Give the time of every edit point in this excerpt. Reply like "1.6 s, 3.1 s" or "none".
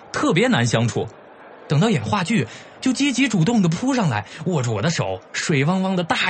5.2 s